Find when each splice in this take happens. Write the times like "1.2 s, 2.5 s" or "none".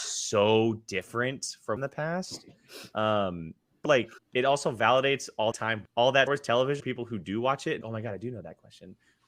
1.8 s, 3.9 s, 4.2 s, 5.5 s, 5.9 s, 6.3 s, 6.8 s, 7.8 s